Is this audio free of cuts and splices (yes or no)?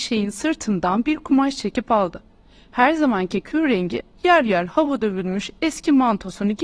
yes